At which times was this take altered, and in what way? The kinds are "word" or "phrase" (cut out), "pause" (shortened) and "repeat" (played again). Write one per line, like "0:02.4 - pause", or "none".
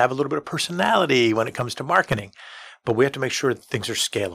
none